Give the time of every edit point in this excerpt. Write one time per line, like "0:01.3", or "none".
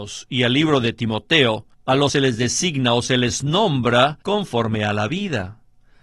0:01.7
0:02.1
0:04.2